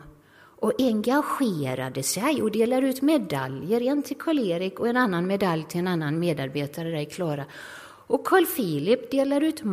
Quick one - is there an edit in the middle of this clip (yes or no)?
no